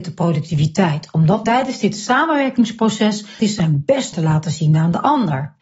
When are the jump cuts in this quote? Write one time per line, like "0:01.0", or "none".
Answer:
0:01.4
0:03.4
0:04.1